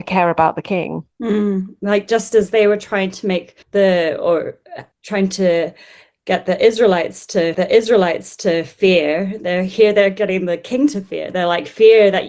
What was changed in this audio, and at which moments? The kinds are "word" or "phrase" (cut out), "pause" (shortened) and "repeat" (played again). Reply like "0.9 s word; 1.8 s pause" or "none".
1.1 s pause; 3.6 s pause; 4.9 s pause; 7.5 s repeat